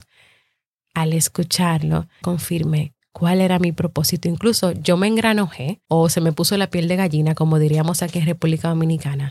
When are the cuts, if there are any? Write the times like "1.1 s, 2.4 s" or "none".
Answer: 2.2 s, 5.9 s